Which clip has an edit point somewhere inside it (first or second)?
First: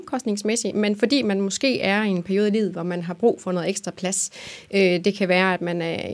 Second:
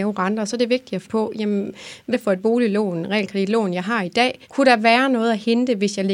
second